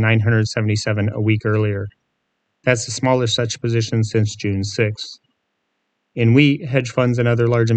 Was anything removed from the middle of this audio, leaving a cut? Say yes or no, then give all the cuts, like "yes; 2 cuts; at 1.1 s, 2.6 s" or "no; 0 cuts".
no; 0 cuts